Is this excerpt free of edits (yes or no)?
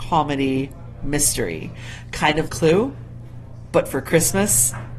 no